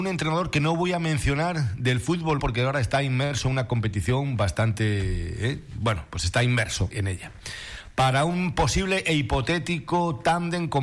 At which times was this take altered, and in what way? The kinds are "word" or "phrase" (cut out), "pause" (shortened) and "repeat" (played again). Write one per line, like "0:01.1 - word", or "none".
0:02.4 - word
0:06.9 - word